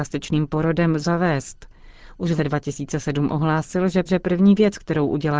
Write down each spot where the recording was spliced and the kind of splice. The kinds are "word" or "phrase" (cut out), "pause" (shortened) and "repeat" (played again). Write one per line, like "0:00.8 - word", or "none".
0:01.0 - word
0:02.4 - word
0:04.1 - repeat